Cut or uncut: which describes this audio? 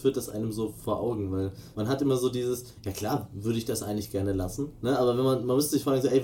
cut